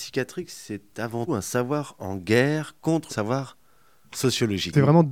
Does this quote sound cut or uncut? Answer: cut